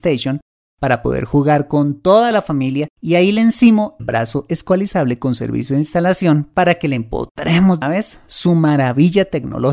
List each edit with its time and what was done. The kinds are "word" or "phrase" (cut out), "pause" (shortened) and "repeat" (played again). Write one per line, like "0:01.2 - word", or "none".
0:03.0 - pause
0:04.0 - word
0:07.8 - word